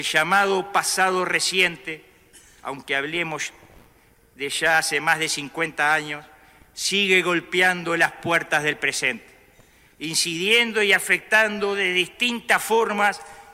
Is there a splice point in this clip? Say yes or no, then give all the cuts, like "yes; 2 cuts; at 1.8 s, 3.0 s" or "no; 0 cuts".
no; 0 cuts